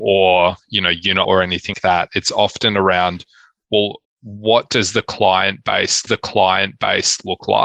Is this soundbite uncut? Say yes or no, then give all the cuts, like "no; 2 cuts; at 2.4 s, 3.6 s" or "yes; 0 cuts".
no; 4 cuts; at 1.2 s, 1.7 s, 4.0 s, 6.1 s